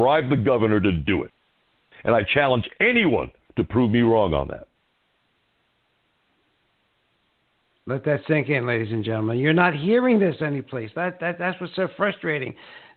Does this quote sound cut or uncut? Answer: uncut